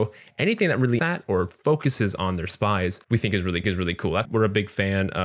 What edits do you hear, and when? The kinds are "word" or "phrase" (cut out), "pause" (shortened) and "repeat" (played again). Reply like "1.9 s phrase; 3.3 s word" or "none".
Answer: 1.0 s word; 3.0 s pause; 3.6 s repeat; 4.2 s word